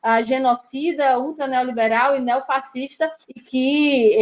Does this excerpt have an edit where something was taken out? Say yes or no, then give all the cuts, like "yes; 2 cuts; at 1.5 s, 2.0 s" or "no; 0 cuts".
yes; 1 cut; at 3.2 s